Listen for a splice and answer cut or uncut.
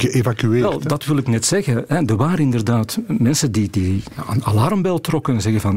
uncut